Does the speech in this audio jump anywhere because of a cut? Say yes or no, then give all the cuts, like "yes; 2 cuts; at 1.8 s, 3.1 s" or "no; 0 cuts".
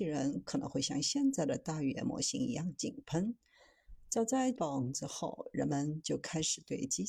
yes; 1 cut; at 4.5 s